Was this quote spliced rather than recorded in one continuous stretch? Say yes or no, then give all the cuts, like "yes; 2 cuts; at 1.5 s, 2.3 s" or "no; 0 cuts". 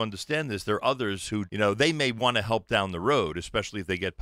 yes; 1 cut; at 1.5 s